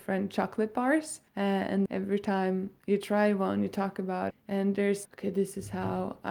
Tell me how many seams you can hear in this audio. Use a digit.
4